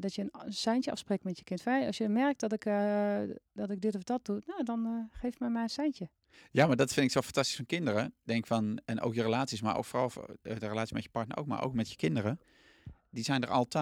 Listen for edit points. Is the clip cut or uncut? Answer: uncut